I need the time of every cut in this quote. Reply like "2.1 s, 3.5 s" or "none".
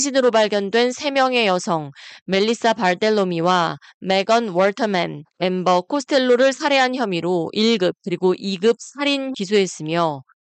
9.3 s